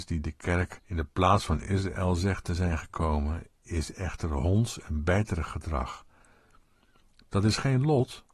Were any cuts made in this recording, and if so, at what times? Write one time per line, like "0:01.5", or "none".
none